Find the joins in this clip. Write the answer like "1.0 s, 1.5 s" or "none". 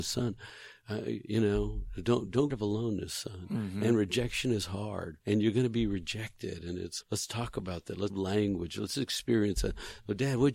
2.5 s, 5.2 s, 7.0 s, 8.1 s